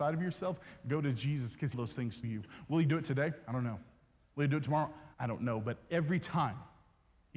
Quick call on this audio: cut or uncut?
cut